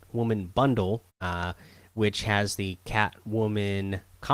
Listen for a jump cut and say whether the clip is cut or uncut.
cut